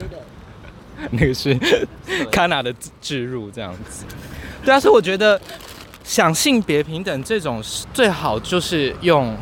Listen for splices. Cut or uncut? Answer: cut